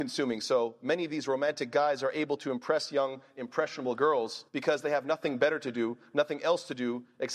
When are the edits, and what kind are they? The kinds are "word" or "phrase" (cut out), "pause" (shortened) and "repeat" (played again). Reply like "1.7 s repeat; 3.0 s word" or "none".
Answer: 4.5 s pause